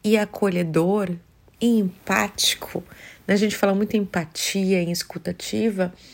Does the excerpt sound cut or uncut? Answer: uncut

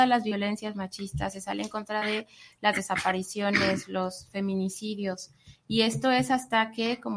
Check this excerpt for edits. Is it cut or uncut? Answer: uncut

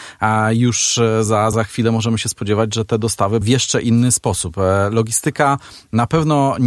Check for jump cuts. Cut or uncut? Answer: cut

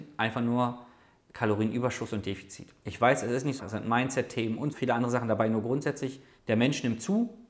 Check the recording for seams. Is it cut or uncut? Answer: cut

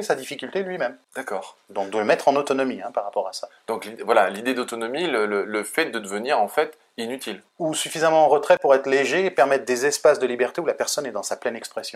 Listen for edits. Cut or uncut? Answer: cut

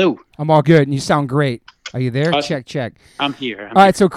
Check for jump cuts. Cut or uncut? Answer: uncut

